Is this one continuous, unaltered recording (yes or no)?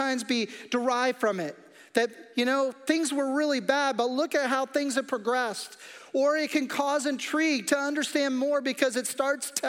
yes